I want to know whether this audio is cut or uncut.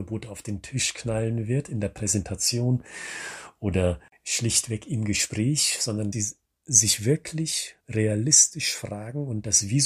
cut